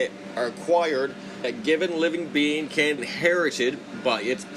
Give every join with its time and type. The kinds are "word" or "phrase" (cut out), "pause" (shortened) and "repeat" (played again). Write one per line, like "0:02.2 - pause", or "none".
0:01.4 - word
0:03.0 - word